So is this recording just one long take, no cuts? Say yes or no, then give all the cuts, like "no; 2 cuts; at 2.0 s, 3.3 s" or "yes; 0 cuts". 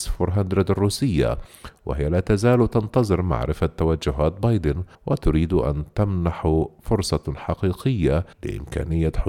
no; 2 cuts; at 4.9 s, 8.3 s